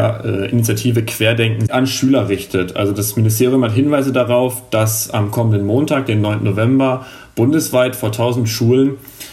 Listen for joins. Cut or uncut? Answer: cut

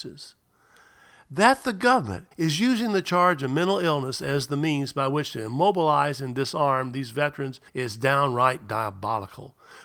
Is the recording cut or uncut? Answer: cut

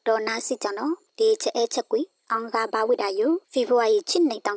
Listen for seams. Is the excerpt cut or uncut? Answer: cut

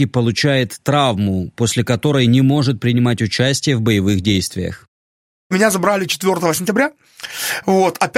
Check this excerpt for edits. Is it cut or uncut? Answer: uncut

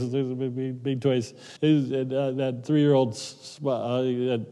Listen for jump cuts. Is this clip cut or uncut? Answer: cut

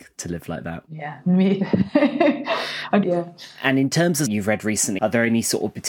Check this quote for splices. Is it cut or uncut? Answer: cut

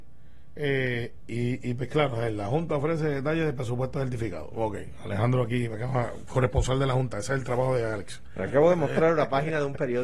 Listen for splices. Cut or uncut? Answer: uncut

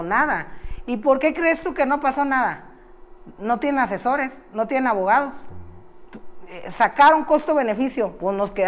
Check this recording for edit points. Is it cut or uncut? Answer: uncut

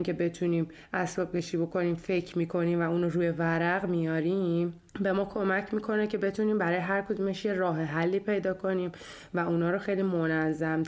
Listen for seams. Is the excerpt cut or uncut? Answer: cut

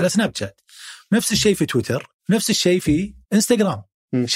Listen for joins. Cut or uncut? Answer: cut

